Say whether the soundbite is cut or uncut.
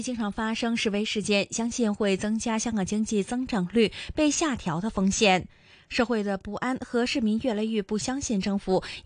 uncut